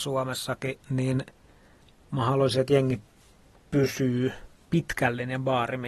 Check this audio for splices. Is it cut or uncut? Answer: uncut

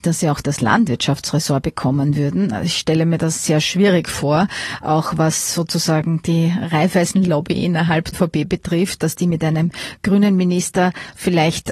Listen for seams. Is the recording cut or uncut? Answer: cut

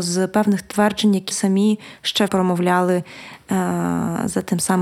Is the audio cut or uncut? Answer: cut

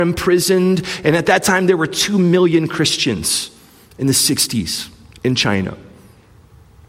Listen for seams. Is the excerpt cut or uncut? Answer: uncut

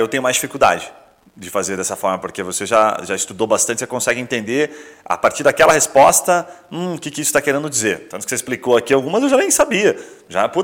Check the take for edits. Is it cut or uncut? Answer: uncut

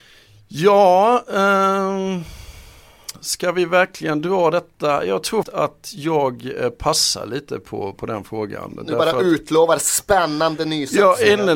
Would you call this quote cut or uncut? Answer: cut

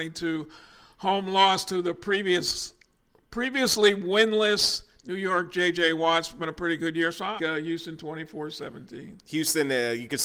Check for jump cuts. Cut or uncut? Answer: cut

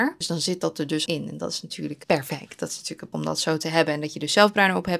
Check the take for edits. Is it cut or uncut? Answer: cut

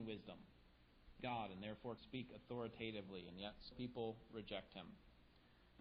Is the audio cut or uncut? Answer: cut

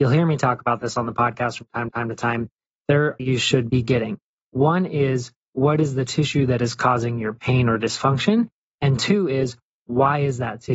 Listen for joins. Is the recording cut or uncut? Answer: cut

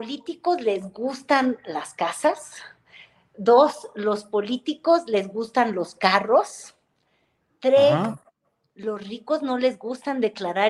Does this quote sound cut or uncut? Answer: uncut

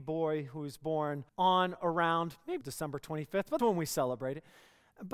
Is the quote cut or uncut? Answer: cut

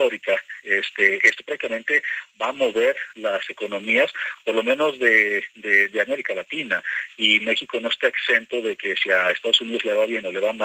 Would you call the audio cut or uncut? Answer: uncut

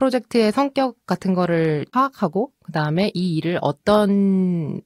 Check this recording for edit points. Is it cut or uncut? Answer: uncut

